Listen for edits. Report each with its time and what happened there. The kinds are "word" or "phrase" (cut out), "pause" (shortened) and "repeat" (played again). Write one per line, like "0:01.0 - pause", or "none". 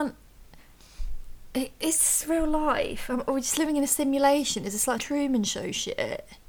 0:05.0 - word

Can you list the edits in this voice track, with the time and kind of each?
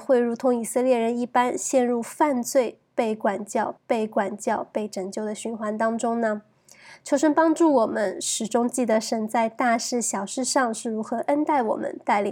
0:03.8 - repeat

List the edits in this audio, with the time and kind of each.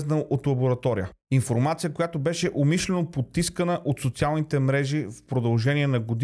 0:01.2 - pause

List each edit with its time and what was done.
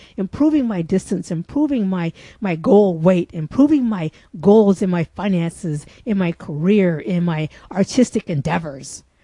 none

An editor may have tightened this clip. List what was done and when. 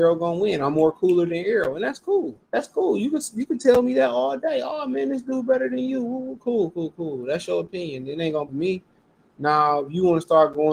0:02.4 - pause
0:06.7 - word
0:08.5 - word

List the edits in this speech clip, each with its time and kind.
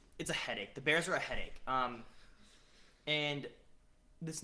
none

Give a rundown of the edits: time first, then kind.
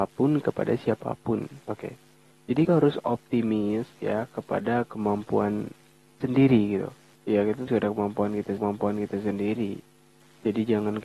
0:01.6 - pause
0:02.6 - word
0:06.2 - word
0:07.1 - pause
0:07.7 - phrase
0:08.6 - repeat

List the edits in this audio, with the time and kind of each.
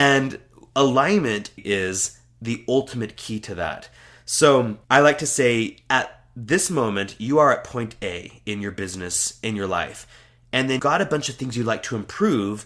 0:01.6 - word
0:04.8 - pause
0:10.8 - word

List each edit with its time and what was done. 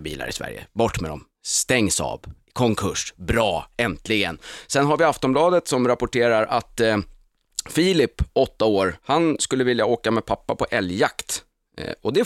0:09.0 - pause

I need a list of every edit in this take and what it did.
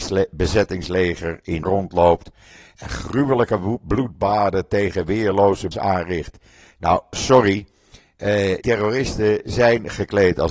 0:01.6 - word
0:05.7 - word
0:08.6 - word

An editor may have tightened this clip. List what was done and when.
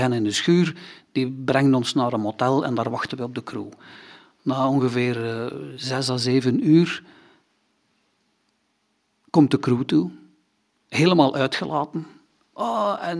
none

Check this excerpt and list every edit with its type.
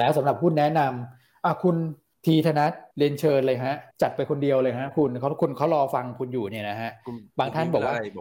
0:02.1 - pause
0:02.9 - pause
0:03.9 - pause

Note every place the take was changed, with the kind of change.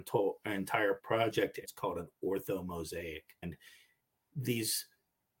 0:01.0 - word
0:01.6 - phrase

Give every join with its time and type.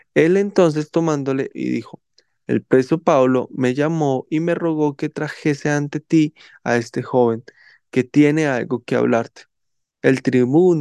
0:01.5 - phrase

